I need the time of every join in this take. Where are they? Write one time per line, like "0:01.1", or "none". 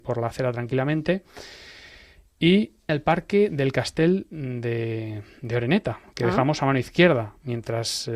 0:02.9

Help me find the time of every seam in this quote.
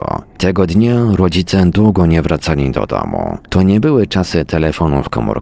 0:03.5

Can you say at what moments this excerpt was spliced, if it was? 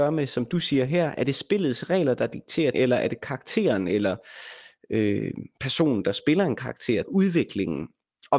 0:02.7
0:07.0

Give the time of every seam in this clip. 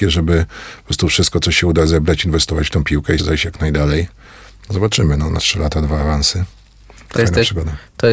0:03.2
0:05.4
0:07.1

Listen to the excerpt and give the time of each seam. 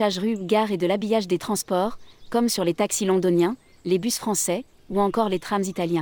none

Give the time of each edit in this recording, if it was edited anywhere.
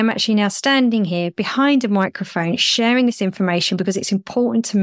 none

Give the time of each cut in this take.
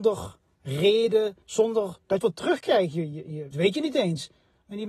0:01.4
0:02.2
0:03.5

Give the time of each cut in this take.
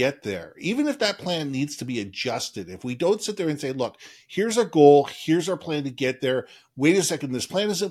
none

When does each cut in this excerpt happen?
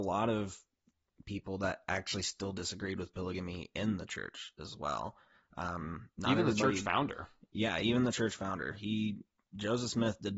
none

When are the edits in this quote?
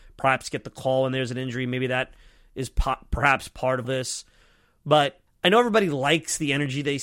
0:03.8
0:05.3

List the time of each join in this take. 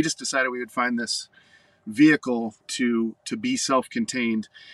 0:02.6

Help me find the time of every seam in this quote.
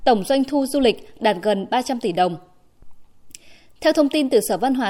none

